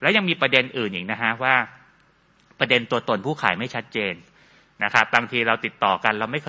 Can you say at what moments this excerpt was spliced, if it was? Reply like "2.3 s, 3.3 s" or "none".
none